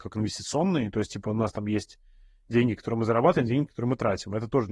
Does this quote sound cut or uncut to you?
uncut